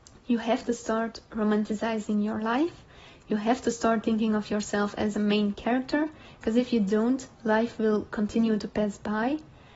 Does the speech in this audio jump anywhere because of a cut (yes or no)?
no